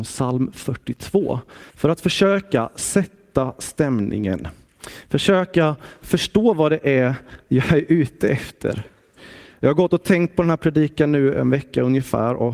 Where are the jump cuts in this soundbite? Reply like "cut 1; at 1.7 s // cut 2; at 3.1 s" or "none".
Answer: cut 1; at 1.7 s